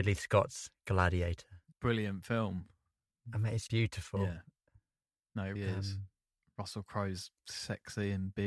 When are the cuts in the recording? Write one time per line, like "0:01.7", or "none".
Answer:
0:01.7
0:03.7
0:05.5